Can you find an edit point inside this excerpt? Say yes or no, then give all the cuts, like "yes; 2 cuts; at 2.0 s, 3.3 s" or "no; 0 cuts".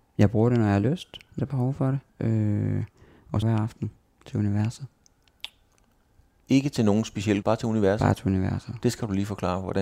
yes; 4 cuts; at 1.4 s, 2.1 s, 3.4 s, 7.4 s